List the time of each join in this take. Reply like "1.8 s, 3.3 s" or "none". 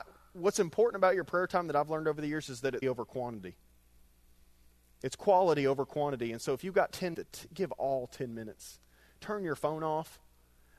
2.8 s, 7.1 s